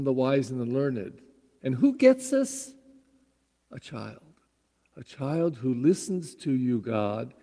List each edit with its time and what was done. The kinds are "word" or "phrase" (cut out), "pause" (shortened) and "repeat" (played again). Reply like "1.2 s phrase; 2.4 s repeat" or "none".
none